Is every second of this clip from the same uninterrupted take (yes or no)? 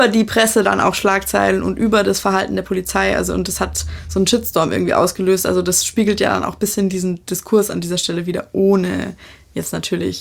yes